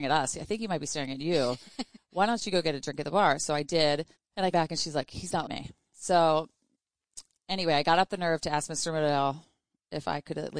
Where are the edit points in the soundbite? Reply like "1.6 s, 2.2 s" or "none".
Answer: 4.1 s, 4.5 s, 5.4 s